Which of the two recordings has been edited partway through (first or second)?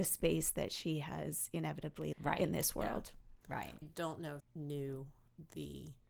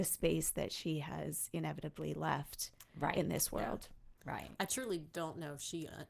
first